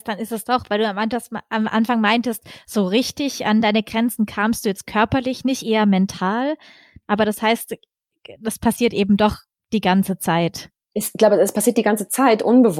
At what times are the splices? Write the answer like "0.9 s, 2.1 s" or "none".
none